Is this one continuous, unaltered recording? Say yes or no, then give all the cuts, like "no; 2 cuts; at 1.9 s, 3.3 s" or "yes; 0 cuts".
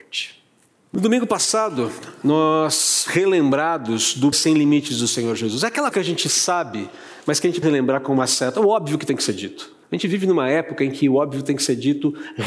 no; 5 cuts; at 3.1 s, 4.3 s, 5.9 s, 7.6 s, 9.8 s